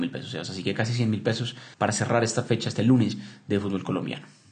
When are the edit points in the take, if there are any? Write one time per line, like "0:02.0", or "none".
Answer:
0:01.7